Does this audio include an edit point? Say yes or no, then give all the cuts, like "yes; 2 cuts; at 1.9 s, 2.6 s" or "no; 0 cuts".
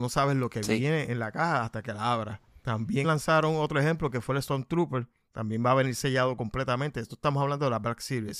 yes; 1 cut; at 3.0 s